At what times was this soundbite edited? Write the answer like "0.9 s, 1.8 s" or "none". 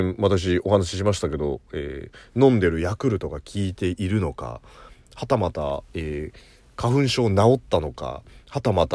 none